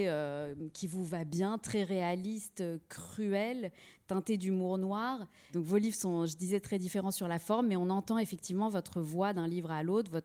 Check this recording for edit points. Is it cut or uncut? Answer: uncut